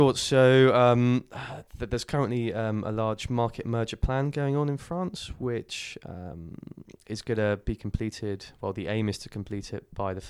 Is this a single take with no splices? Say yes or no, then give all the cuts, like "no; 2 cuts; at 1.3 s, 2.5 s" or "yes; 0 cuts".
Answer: yes; 0 cuts